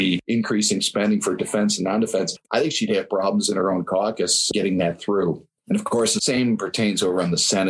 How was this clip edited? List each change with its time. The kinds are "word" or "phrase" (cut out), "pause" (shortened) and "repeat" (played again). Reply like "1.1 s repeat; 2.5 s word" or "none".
none